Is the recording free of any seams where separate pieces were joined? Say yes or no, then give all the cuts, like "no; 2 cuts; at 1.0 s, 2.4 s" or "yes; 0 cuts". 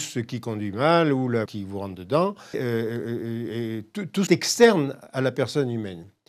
no; 3 cuts; at 1.5 s, 2.5 s, 4.3 s